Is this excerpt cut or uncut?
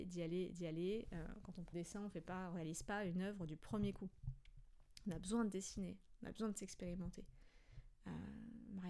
cut